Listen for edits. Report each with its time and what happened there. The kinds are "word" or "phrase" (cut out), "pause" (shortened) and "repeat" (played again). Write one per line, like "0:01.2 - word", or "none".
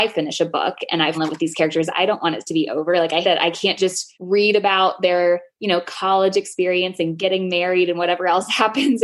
0:01.1 - word
0:03.2 - word
0:04.1 - pause